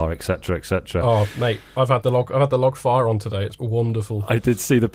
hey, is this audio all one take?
no; 1 cut; at 3.6 s

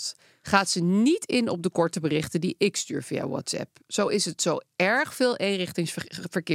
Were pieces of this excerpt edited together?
no; 0 cuts

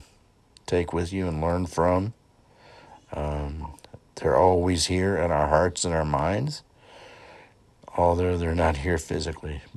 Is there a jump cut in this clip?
no; 0 cuts

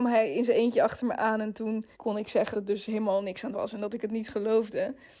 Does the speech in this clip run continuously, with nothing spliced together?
no; 3 cuts; at 1.9 s, 2.5 s, 3.5 s

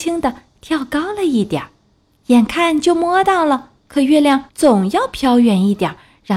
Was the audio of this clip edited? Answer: yes; 3 cuts; at 1.9 s, 3.8 s, 4.5 s

